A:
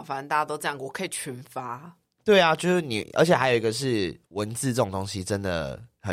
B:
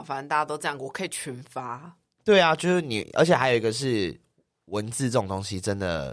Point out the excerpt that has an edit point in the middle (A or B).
A